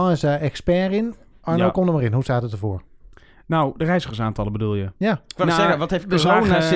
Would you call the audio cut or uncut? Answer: uncut